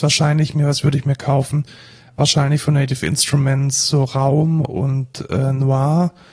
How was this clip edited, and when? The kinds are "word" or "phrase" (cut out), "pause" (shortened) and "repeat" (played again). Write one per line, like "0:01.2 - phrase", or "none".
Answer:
none